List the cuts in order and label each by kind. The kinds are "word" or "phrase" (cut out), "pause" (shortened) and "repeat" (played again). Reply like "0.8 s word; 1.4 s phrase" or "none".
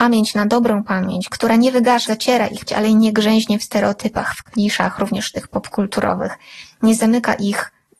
2.1 s word; 2.7 s word